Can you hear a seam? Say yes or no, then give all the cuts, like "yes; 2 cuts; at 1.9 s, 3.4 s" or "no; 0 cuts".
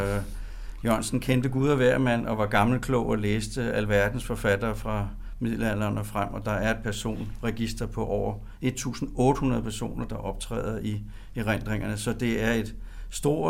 no; 0 cuts